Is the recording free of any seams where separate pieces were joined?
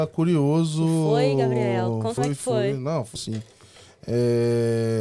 no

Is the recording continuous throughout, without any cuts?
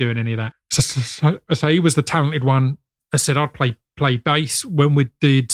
yes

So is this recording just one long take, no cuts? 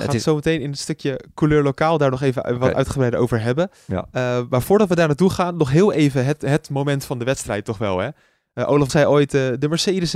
no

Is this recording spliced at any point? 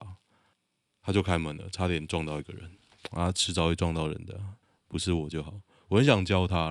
no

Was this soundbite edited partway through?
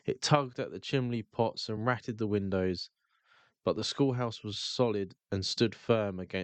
no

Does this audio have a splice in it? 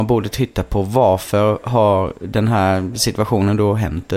no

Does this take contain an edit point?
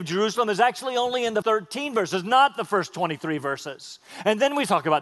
yes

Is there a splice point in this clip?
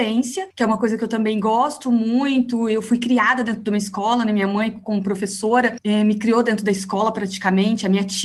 no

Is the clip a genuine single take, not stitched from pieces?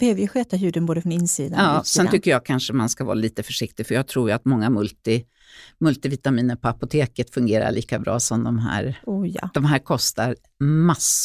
yes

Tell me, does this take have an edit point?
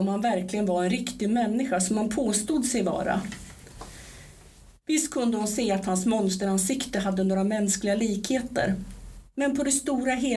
no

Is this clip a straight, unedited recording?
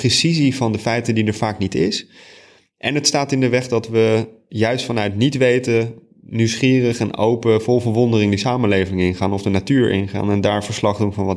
yes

